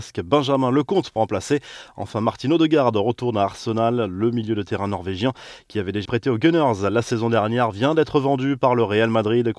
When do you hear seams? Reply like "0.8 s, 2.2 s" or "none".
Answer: 1.2 s, 6.0 s